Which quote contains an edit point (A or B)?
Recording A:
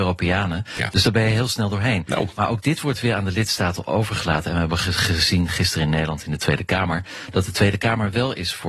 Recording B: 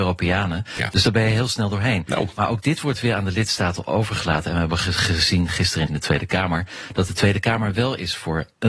B